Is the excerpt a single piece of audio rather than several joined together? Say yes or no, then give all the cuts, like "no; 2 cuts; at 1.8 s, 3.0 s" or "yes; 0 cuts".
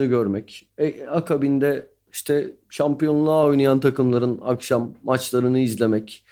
yes; 0 cuts